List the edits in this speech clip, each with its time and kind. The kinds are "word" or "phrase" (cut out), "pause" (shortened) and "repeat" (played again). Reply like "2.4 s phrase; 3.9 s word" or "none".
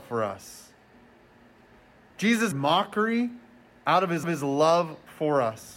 2.5 s word; 4.2 s repeat